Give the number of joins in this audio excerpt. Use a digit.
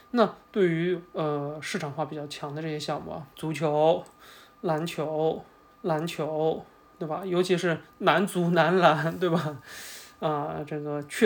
2